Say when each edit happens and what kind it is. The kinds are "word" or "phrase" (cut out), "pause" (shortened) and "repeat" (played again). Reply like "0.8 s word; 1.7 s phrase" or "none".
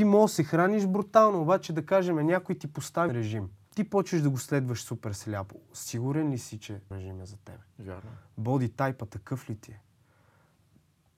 3.1 s word; 3.6 s pause; 6.9 s word